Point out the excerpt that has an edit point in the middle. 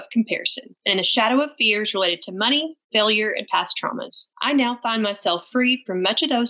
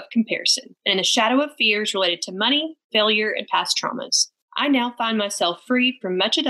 first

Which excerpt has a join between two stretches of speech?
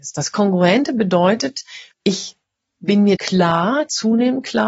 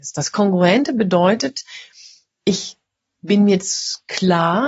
first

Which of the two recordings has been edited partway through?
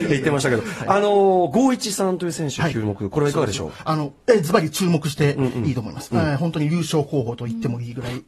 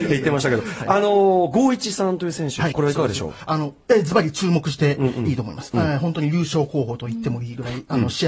second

